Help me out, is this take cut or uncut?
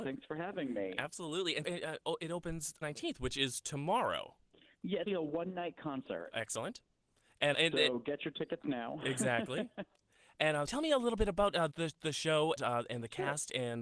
cut